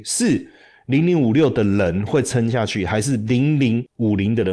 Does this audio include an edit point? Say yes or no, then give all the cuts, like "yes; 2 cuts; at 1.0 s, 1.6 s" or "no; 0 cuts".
no; 0 cuts